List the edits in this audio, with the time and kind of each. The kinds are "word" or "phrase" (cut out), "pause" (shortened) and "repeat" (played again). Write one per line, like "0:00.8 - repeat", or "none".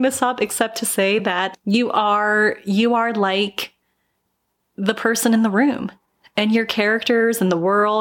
none